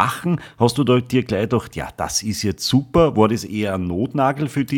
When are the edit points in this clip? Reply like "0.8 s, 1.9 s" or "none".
none